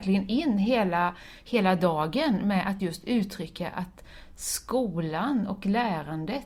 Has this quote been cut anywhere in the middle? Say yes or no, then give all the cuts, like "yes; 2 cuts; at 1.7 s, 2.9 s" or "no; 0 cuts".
no; 0 cuts